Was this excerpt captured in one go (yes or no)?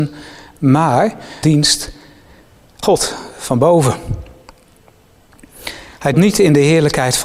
no